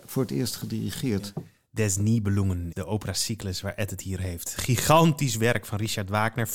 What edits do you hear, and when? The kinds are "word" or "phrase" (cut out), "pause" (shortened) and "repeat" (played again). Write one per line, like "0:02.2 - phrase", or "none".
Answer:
0:01.8 - word
0:02.7 - word
0:04.2 - word